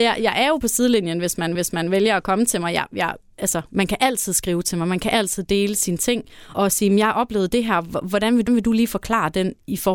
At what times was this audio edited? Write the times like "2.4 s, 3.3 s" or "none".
1.5 s, 6.5 s, 8.5 s